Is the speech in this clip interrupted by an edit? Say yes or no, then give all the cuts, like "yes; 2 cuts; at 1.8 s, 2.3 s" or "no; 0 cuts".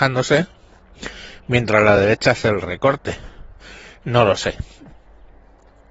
no; 0 cuts